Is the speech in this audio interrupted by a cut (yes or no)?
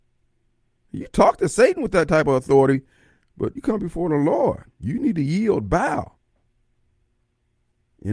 yes